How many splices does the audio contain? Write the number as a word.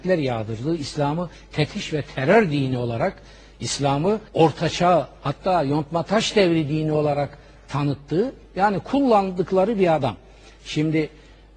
one